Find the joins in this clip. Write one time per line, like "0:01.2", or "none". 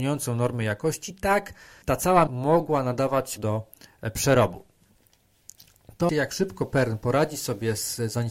0:01.8
0:02.3
0:03.4
0:06.1